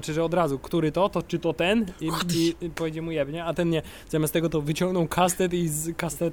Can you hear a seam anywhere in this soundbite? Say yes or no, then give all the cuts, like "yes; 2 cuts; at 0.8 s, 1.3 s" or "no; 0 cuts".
no; 0 cuts